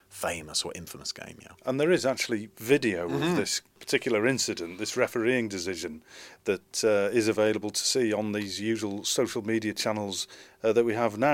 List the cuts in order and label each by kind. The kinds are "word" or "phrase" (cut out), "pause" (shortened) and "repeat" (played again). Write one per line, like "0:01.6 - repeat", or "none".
0:01.6 - pause